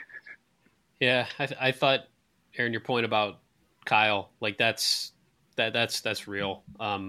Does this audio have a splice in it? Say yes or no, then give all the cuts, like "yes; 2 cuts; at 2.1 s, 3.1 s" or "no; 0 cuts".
no; 0 cuts